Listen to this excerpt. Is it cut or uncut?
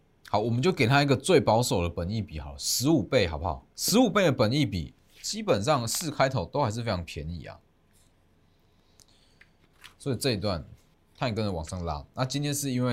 cut